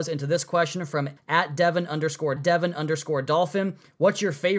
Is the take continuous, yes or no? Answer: no